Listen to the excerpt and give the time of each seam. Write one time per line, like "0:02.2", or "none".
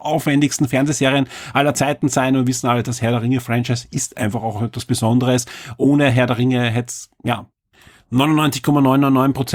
none